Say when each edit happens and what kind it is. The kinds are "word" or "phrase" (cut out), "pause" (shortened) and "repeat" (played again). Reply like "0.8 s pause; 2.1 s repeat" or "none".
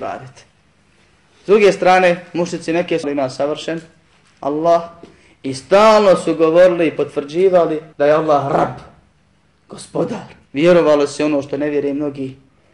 3.0 s word; 7.9 s pause; 10.5 s pause